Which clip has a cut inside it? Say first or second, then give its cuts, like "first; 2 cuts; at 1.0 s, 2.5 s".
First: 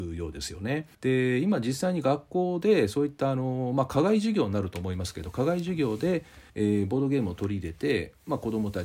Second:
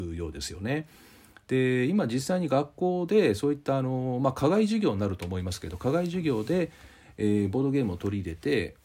first; 2 cuts; at 0.9 s, 6.5 s